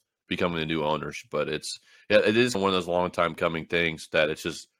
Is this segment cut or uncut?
cut